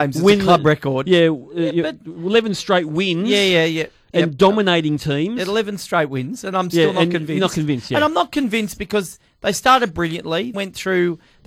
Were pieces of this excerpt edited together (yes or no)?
yes